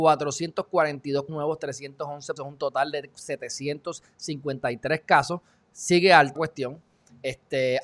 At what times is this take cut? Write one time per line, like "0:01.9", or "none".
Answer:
0:01.3
0:02.4
0:06.4